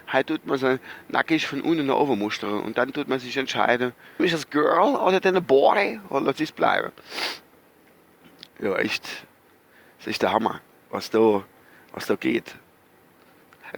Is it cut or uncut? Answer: cut